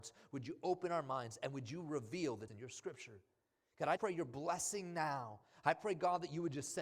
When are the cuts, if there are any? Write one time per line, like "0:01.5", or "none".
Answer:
0:02.5
0:04.0